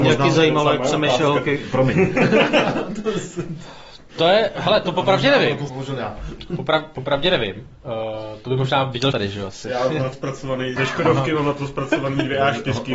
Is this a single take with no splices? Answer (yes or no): no